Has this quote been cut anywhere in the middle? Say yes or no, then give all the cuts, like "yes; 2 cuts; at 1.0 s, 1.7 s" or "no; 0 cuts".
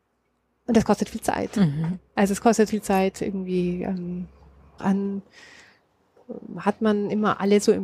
yes; 3 cuts; at 2.1 s, 2.7 s, 4.8 s